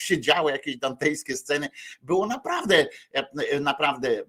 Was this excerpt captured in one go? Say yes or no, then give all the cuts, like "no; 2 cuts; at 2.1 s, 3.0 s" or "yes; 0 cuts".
yes; 0 cuts